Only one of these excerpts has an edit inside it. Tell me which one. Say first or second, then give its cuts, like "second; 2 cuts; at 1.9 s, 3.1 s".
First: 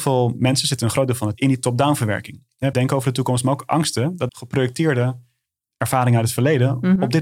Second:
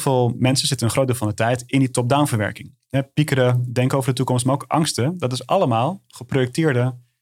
first; 3 cuts; at 1.3 s, 2.7 s, 4.3 s